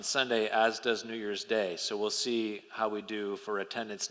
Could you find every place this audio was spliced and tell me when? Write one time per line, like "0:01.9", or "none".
none